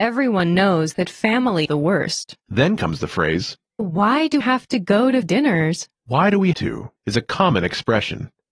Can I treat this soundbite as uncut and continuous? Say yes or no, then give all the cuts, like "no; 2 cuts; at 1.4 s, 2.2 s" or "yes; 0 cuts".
no; 8 cuts; at 1.6 s, 2.4 s, 3.8 s, 4.4 s, 5.2 s, 5.9 s, 6.5 s, 7.0 s